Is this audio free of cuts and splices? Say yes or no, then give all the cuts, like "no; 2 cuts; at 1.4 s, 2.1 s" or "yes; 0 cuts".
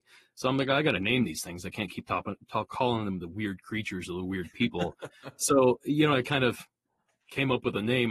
yes; 0 cuts